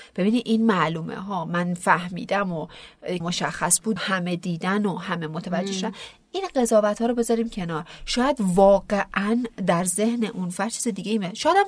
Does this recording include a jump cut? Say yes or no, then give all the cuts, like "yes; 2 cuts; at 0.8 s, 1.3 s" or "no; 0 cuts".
yes; 2 cuts; at 3.2 s, 4.0 s